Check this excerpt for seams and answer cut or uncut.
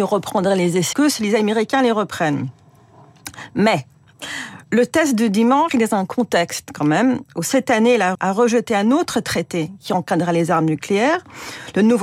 cut